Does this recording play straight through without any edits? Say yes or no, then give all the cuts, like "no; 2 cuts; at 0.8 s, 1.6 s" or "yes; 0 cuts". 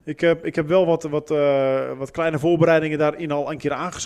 yes; 0 cuts